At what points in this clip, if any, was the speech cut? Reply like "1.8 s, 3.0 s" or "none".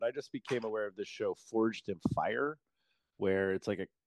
none